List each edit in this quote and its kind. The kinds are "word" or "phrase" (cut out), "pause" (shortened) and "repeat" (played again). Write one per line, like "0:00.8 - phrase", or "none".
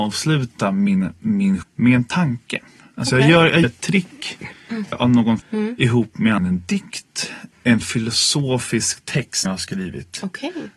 0:01.6 - word
0:03.6 - word
0:04.9 - word
0:05.4 - word
0:06.4 - word
0:07.5 - word
0:09.4 - word